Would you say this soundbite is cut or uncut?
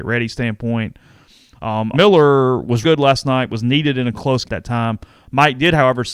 cut